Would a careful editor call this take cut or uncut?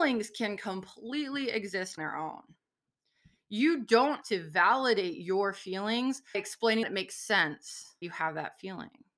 cut